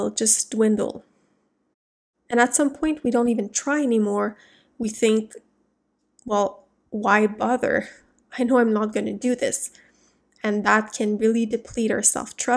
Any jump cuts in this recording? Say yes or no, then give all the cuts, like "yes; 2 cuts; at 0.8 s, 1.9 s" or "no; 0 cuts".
no; 0 cuts